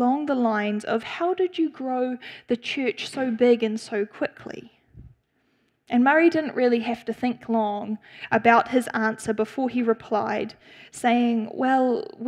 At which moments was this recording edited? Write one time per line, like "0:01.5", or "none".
none